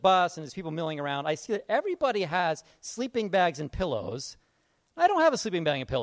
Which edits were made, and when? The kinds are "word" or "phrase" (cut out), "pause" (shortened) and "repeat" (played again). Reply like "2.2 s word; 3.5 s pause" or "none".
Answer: none

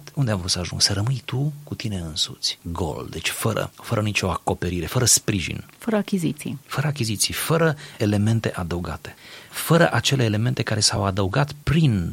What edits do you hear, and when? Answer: none

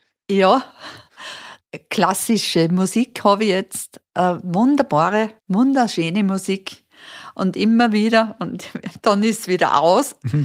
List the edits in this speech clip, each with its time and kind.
5.4 s pause

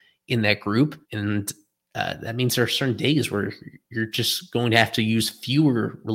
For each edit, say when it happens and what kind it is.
1.0 s pause

